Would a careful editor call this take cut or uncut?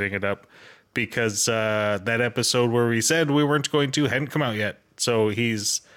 uncut